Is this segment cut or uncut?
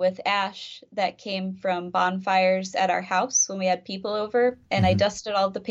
uncut